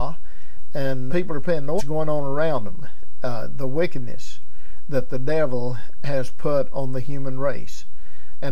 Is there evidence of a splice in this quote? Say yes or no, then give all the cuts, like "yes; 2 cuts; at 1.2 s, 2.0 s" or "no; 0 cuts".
yes; 2 cuts; at 1.1 s, 1.8 s